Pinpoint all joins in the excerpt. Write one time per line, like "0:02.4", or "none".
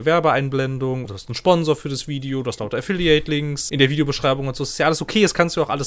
0:01.0
0:03.7